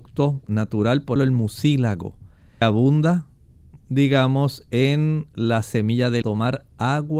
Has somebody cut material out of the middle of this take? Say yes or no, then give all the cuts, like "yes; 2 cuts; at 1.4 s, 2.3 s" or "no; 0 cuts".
yes; 3 cuts; at 1.2 s, 2.6 s, 6.2 s